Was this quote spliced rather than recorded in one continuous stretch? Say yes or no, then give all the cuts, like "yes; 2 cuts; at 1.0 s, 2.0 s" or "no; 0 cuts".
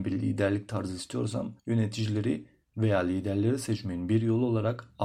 yes; 1 cut; at 1.6 s